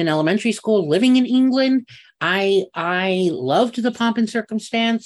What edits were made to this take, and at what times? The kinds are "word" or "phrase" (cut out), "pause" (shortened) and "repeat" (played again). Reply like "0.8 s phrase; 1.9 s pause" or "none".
none